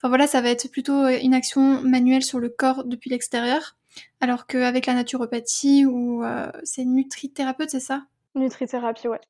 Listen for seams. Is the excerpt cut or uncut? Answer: uncut